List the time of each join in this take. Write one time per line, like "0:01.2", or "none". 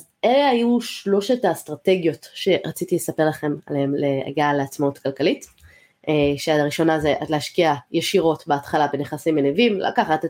none